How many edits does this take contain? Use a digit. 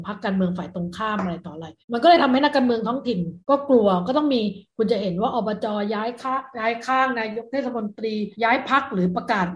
3